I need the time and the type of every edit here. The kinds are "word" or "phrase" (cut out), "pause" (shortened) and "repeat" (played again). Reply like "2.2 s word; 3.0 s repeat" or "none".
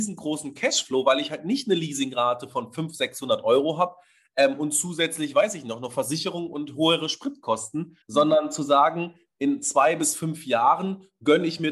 8.0 s pause